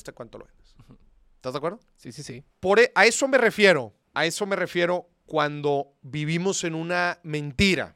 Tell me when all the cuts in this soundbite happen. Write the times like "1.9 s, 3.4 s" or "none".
1.1 s, 2.5 s, 4.0 s